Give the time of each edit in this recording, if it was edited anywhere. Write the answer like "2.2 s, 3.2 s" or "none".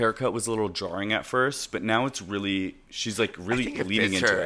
none